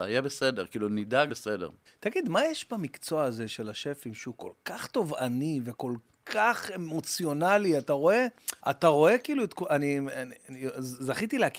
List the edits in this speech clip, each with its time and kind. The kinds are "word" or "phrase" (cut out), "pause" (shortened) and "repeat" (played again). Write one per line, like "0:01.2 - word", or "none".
0:01.3 - phrase
0:01.9 - pause
0:08.6 - pause

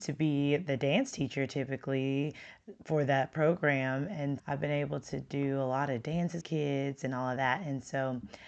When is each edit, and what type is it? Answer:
0:04.4 - word
0:06.4 - phrase

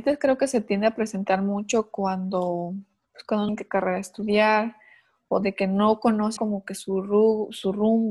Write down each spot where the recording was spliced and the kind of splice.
0:03.5 - word
0:06.4 - word

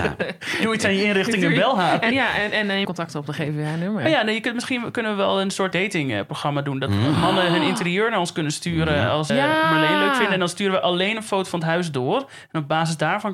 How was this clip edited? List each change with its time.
0:02.1 - word
0:02.8 - word
0:05.7 - word
0:09.3 - word

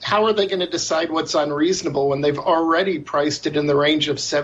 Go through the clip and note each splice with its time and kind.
none

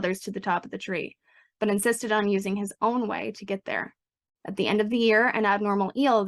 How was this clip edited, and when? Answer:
none

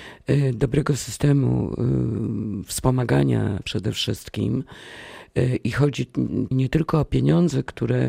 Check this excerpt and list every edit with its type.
0:03.6 - word
0:06.5 - word

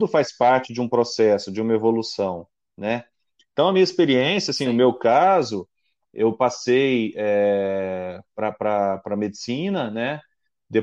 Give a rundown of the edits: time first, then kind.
none

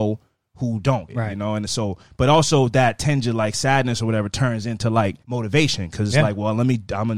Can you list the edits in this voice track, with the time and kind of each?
0:01.1 - phrase
0:05.2 - pause

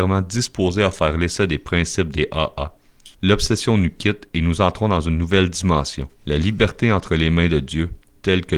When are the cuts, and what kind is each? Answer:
0:03.1 - pause
0:06.2 - pause

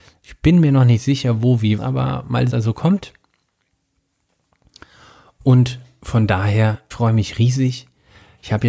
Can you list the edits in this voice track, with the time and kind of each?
0:01.8 - word
0:02.5 - phrase
0:06.9 - word

